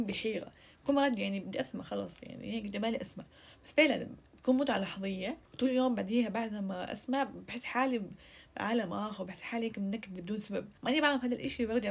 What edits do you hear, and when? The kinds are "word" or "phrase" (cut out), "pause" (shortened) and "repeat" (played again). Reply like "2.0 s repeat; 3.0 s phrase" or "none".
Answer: 5.4 s pause; 10.8 s pause